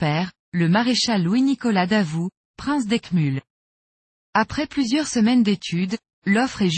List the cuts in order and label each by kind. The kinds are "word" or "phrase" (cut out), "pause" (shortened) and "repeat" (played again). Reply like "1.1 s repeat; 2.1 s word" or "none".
none

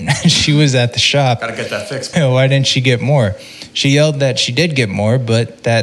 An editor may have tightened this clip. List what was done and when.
2.1 s word

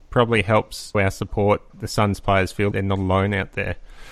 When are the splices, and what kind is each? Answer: 0.9 s word; 1.7 s word; 2.7 s word

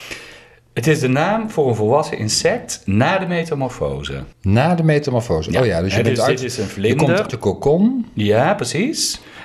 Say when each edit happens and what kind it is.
4.3 s pause; 7.3 s word

